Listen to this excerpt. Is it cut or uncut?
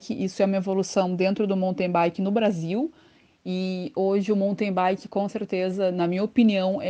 uncut